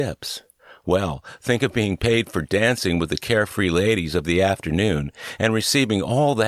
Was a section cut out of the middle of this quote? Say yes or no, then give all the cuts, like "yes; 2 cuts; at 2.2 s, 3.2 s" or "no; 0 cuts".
no; 0 cuts